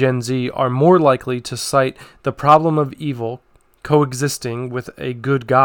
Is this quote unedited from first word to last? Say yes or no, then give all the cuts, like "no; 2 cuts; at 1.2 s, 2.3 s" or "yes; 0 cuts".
yes; 0 cuts